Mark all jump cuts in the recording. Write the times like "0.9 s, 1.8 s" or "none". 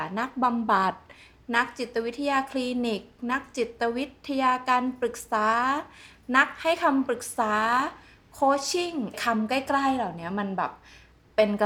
none